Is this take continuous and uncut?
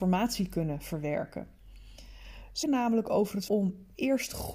no; 2 cuts; at 2.6 s, 3.5 s

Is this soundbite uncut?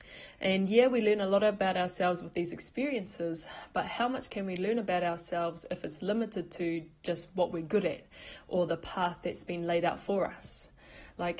yes; 0 cuts

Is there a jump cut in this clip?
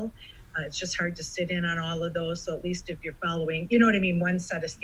no; 0 cuts

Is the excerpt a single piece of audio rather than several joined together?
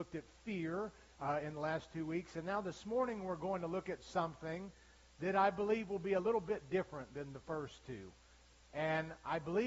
yes; 0 cuts

